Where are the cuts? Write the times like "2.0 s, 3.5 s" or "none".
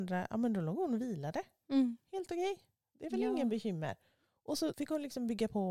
4.7 s